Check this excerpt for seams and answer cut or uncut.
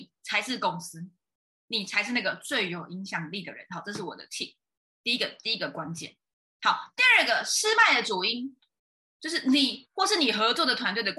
uncut